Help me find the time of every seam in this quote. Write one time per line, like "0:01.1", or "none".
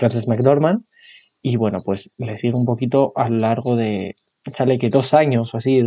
none